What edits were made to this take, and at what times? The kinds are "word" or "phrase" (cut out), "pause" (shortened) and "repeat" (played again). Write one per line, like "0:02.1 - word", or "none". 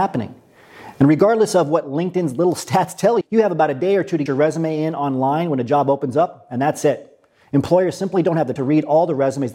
0:03.2 - word
0:04.3 - word
0:08.6 - word